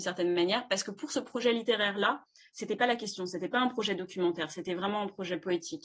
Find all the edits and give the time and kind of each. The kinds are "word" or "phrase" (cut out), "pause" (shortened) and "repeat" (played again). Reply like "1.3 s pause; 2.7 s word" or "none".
none